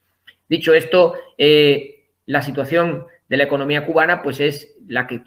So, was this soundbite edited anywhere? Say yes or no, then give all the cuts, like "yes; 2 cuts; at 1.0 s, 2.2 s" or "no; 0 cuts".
no; 0 cuts